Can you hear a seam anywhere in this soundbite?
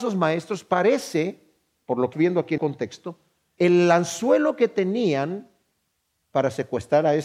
yes; 3 cuts; at 2.1 s, 2.6 s, 3.6 s

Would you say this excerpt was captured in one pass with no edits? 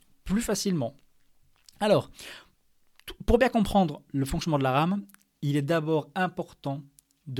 yes; 0 cuts

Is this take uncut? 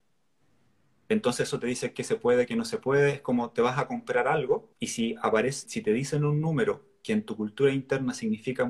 no; 2 cuts; at 4.7 s, 5.7 s

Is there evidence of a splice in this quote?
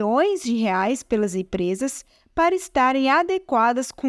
no; 0 cuts

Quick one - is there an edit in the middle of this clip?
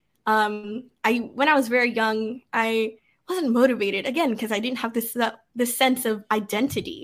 no; 0 cuts

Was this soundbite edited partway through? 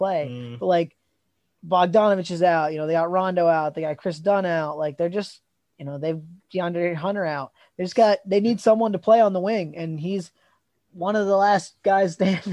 no; 0 cuts

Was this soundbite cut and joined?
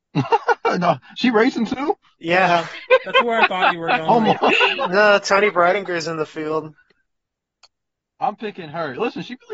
no; 0 cuts

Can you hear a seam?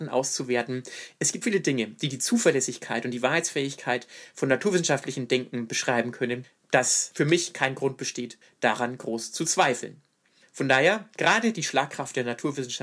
yes; 1 cut; at 1.4 s

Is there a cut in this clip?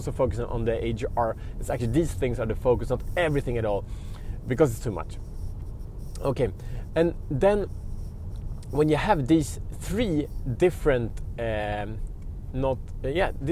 no; 0 cuts

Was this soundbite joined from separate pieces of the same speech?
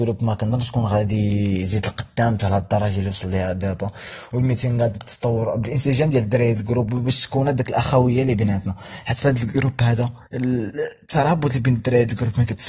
yes; 2 cuts; at 4.9 s, 10.2 s

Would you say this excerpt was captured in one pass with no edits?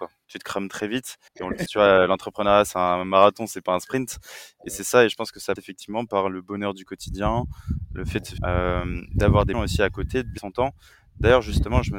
no; 6 cuts; at 1.3 s, 1.7 s, 5.6 s, 8.4 s, 9.5 s, 10.4 s

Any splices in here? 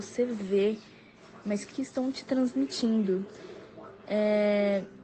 yes; 1 cut; at 1.7 s

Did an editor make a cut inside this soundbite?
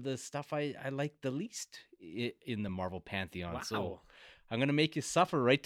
no; 0 cuts

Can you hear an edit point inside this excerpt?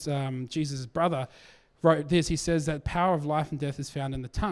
no; 0 cuts

